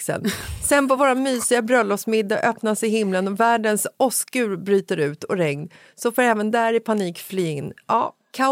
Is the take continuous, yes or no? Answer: yes